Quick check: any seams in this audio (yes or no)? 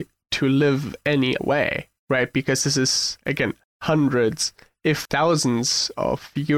yes